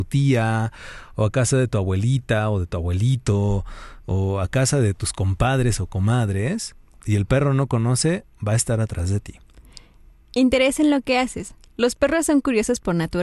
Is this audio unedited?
yes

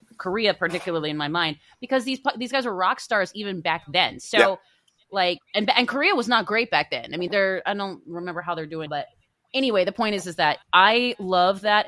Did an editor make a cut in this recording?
yes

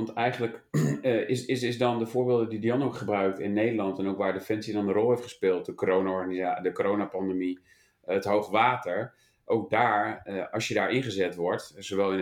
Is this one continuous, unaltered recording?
yes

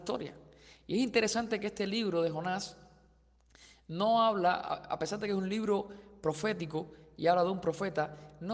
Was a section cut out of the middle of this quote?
no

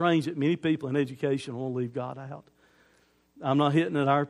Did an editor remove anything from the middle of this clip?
no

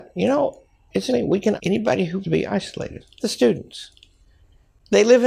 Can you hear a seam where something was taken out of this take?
yes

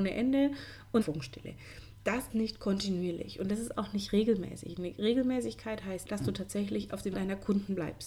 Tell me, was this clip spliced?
yes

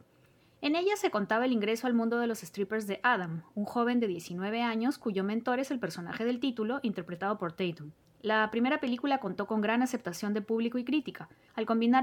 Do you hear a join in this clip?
no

